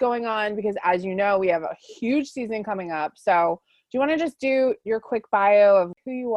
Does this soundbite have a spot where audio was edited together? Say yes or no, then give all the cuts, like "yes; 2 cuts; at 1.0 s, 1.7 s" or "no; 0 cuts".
no; 0 cuts